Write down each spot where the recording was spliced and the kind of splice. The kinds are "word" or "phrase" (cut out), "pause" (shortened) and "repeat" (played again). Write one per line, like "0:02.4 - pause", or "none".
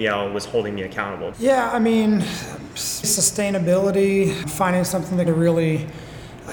0:01.3 - word
0:03.0 - word
0:04.4 - word
0:05.3 - word